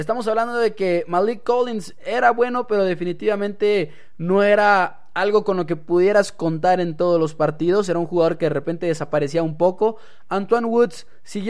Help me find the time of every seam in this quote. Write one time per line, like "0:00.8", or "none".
none

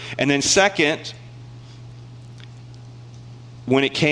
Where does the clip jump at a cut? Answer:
none

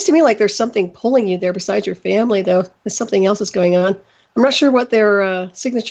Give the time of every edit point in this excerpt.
none

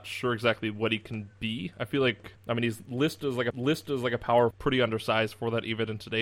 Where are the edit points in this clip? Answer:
0:02.4
0:03.5
0:04.5

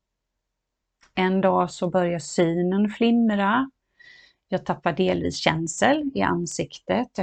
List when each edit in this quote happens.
none

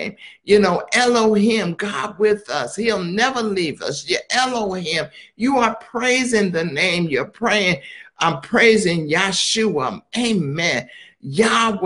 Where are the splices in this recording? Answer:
none

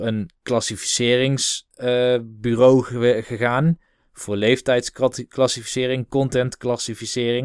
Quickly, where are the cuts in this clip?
none

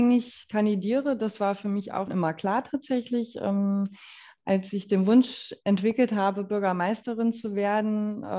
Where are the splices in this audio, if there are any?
0:02.1

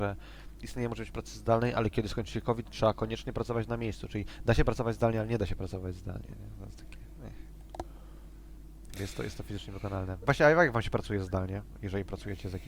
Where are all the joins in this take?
none

